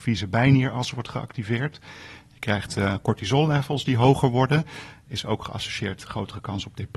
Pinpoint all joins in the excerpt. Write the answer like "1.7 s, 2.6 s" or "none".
6.0 s